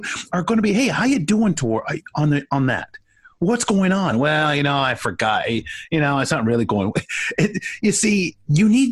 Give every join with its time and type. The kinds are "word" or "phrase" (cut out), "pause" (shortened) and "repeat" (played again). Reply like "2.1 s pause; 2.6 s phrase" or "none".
none